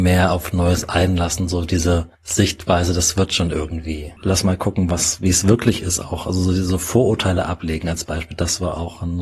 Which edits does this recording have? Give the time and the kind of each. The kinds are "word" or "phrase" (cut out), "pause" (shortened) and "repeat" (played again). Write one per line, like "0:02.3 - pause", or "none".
0:02.1 - pause
0:04.2 - pause

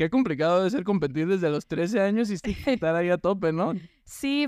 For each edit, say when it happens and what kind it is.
none

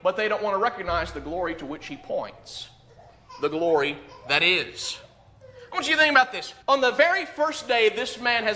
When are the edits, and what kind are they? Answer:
0:06.6 - pause

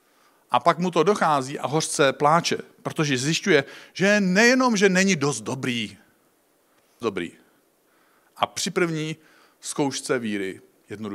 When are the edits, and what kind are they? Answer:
0:07.0 - phrase

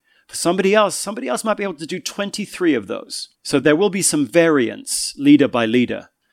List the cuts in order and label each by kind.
0:03.3 - pause

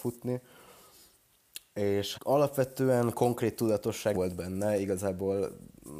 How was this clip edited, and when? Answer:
0:02.1 - word
0:04.1 - word

